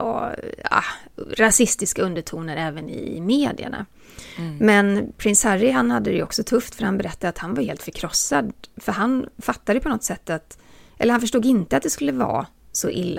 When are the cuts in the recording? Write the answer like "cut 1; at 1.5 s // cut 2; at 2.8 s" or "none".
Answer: none